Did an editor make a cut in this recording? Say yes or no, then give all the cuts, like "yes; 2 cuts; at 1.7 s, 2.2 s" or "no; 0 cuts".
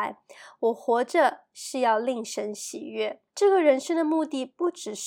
yes; 1 cut; at 3.3 s